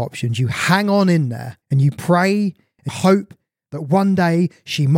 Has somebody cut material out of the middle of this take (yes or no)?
yes